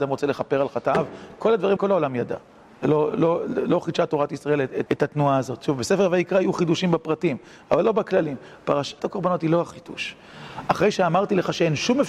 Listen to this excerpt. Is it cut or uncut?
cut